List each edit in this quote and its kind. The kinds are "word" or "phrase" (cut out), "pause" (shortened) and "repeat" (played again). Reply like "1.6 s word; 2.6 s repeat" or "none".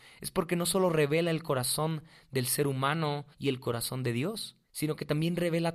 3.3 s pause; 4.6 s pause